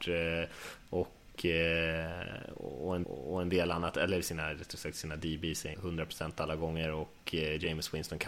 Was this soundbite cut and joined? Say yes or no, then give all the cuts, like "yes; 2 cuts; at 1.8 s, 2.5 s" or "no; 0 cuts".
yes; 2 cuts; at 3.0 s, 5.7 s